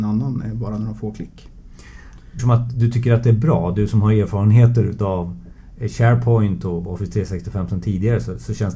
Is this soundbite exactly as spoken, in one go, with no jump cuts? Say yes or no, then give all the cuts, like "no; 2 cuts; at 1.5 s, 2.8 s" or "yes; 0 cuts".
no; 1 cut; at 2.4 s